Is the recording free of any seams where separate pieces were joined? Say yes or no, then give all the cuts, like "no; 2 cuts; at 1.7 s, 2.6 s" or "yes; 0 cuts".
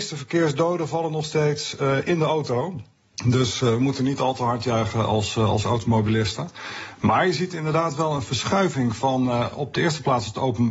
yes; 0 cuts